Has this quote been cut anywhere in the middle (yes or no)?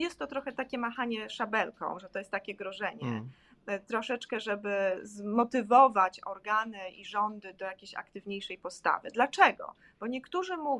no